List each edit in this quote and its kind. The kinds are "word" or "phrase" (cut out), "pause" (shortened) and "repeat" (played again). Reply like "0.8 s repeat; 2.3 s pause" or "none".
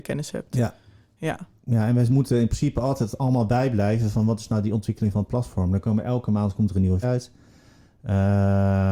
7.0 s word